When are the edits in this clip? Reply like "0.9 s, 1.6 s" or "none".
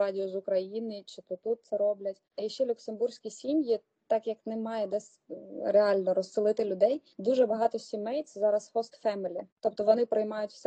2.3 s, 7.1 s, 9.5 s